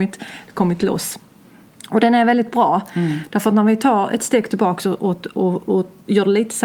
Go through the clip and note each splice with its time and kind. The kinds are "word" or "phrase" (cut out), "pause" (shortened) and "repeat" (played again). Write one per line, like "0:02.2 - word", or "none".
none